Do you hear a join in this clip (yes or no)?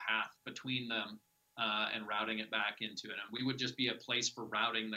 no